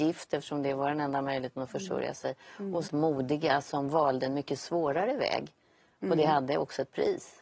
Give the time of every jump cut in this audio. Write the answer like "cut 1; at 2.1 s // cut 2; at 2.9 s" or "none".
cut 1; at 2.9 s